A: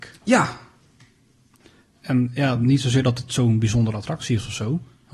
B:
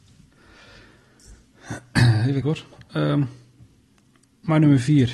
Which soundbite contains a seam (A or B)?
B